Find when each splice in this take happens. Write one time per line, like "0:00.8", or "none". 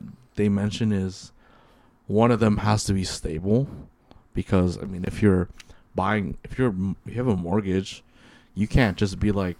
none